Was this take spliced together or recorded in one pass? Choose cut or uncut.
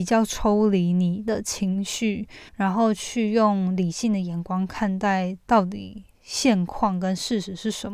cut